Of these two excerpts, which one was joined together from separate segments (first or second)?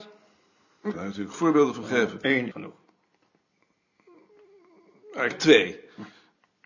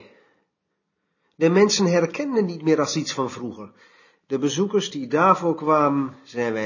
first